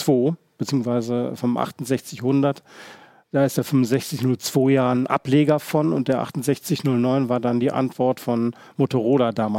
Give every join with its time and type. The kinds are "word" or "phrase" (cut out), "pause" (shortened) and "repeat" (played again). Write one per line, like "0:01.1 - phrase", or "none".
none